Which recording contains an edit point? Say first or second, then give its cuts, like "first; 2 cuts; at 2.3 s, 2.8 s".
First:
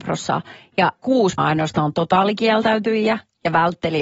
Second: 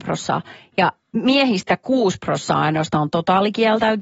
first; 2 cuts; at 1.0 s, 1.4 s